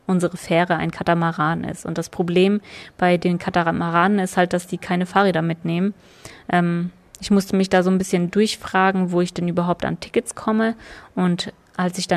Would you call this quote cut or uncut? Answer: uncut